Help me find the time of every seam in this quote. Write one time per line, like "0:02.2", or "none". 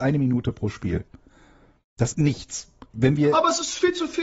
0:02.1